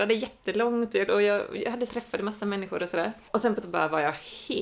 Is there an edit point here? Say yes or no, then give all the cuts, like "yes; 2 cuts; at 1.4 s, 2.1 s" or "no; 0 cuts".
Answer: yes; 3 cuts; at 1.1 s, 1.9 s, 3.6 s